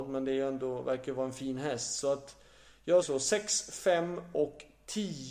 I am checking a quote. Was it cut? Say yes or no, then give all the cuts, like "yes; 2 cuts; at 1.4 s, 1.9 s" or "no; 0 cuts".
yes; 1 cut; at 3.0 s